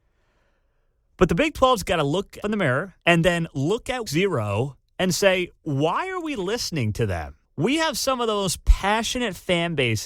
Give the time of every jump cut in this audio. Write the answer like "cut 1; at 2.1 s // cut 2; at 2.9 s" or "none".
cut 1; at 2.4 s // cut 2; at 3.0 s // cut 3; at 4.1 s // cut 4; at 5.6 s // cut 5; at 7.4 s